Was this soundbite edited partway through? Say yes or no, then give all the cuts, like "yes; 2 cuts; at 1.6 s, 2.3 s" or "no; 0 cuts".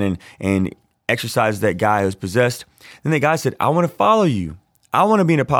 no; 0 cuts